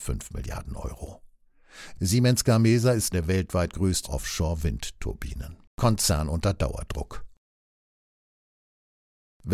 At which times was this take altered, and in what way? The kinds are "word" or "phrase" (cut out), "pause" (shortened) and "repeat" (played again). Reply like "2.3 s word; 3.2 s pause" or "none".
3.1 s word; 4.0 s phrase; 5.7 s pause

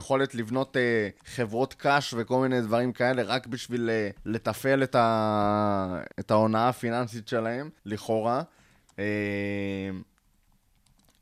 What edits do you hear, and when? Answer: 1.2 s pause; 4.2 s pause; 6.1 s pause; 7.8 s pause

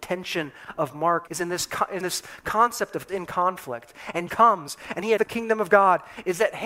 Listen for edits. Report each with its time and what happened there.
1.3 s word; 2.0 s word; 3.1 s word; 4.3 s word; 5.2 s word

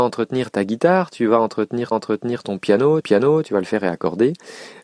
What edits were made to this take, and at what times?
1.9 s repeat; 3.0 s repeat

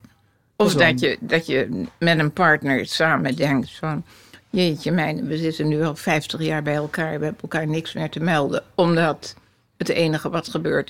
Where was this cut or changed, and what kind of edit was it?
none

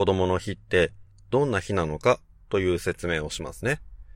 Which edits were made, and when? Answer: none

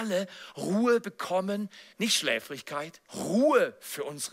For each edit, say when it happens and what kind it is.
1.9 s pause; 3.1 s pause

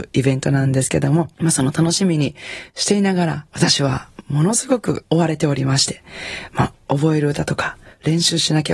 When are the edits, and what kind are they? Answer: none

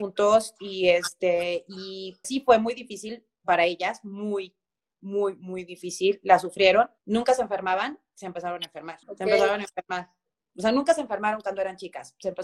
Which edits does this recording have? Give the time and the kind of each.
2.2 s word; 7.0 s pause; 9.0 s pause

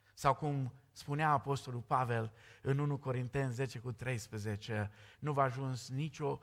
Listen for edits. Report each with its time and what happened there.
none

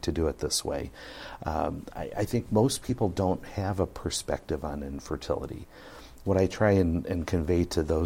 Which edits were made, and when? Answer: none

